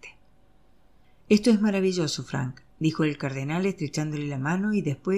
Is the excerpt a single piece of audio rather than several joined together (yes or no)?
yes